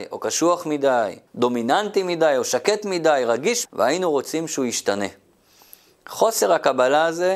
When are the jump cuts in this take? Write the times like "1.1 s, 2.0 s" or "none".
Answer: 1.3 s, 3.6 s